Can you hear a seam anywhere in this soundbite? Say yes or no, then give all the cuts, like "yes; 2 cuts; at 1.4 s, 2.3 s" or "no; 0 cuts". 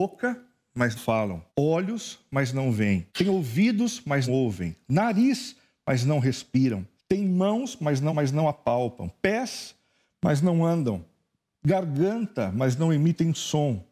yes; 6 cuts; at 0.9 s, 1.5 s, 3.1 s, 4.3 s, 7.0 s, 8.1 s